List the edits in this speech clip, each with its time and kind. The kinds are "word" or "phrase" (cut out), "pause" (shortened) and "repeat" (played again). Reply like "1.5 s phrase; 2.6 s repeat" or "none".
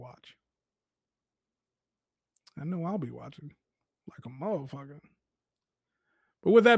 none